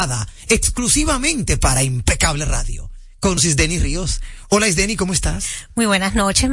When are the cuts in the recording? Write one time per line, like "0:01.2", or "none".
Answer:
0:03.4